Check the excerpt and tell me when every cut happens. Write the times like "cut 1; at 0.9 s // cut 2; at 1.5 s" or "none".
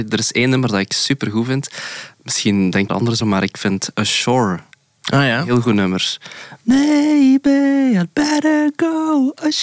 cut 1; at 2.9 s // cut 2; at 3.2 s // cut 3; at 4.7 s